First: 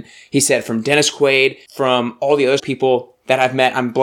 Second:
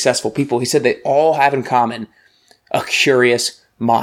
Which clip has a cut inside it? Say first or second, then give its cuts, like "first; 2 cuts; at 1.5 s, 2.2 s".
first; 2 cuts; at 1.7 s, 2.6 s